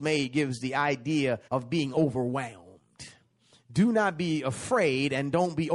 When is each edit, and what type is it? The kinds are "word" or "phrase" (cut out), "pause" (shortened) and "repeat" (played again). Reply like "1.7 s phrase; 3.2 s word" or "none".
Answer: 1.4 s pause

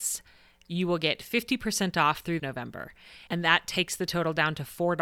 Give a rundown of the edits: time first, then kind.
2.4 s phrase

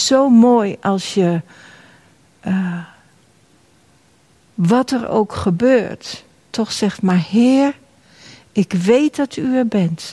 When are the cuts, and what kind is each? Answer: none

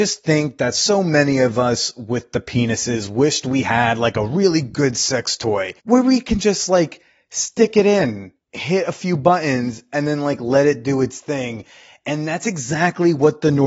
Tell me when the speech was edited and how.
5.8 s pause; 8.4 s pause

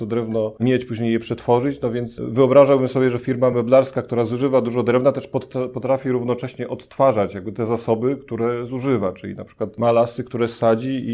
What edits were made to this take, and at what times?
none

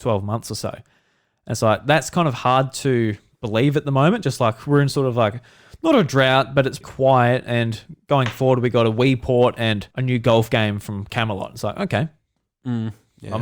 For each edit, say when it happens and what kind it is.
6.8 s word; 9.9 s pause

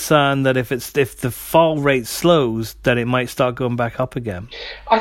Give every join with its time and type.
none

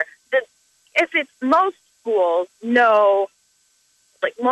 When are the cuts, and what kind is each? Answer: 1.3 s pause; 2.5 s pause

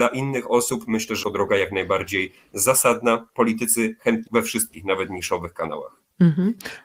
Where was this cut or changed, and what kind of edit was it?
1.2 s word; 4.3 s word

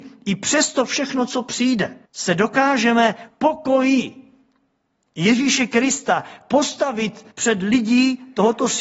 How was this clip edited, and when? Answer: 2.1 s pause; 3.3 s word; 7.3 s pause

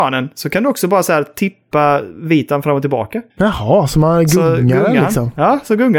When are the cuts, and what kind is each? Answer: 3.3 s pause

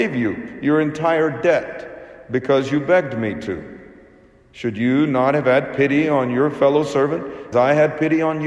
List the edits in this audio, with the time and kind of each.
7.5 s word

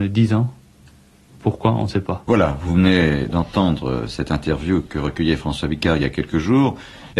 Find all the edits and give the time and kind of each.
none

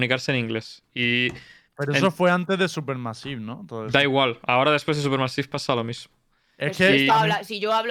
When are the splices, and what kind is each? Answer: none

